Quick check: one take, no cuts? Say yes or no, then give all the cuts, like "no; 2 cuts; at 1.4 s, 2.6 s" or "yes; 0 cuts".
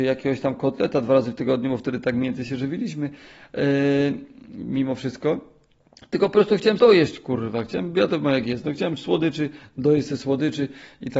no; 1 cut; at 6.8 s